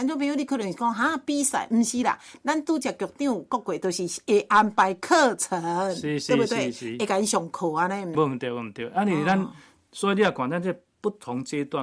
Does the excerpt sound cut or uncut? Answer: cut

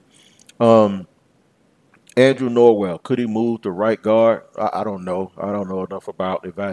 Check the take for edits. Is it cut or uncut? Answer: uncut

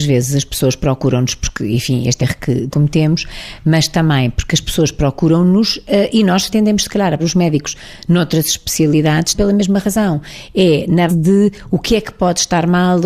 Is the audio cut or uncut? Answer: cut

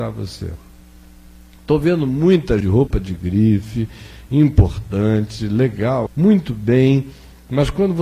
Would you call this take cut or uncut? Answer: cut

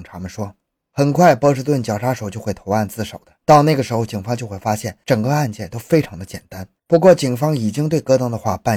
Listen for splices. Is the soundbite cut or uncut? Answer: cut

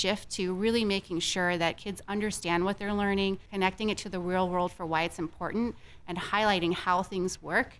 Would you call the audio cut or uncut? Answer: cut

